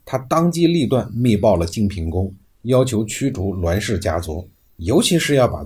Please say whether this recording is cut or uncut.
uncut